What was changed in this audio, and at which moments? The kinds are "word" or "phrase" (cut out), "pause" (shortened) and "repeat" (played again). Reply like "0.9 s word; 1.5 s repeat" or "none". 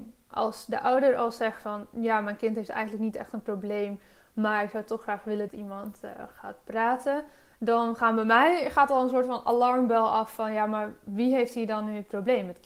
5.5 s phrase